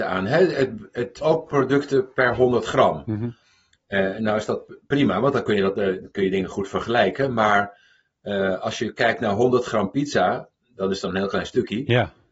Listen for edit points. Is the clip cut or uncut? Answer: cut